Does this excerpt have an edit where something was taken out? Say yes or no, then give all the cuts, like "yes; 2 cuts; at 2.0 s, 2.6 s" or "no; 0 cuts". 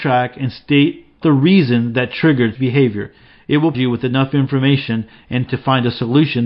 yes; 4 cuts; at 1.2 s, 2.5 s, 3.7 s, 5.5 s